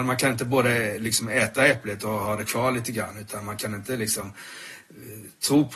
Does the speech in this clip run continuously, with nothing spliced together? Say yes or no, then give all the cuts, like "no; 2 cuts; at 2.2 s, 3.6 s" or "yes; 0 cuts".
yes; 0 cuts